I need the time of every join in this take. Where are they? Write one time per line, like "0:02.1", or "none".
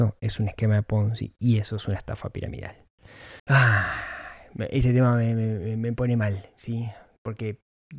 0:03.4